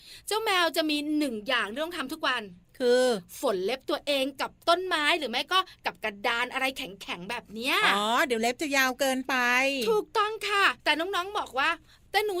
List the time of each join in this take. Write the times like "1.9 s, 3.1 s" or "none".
10.8 s